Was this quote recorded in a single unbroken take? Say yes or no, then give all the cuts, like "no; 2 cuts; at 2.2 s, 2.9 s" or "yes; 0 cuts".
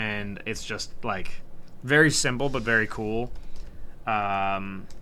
yes; 0 cuts